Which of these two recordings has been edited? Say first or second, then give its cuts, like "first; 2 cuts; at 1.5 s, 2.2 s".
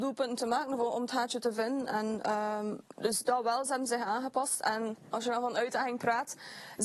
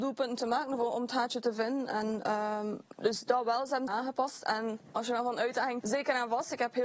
second; 2 cuts; at 3.9 s, 5.8 s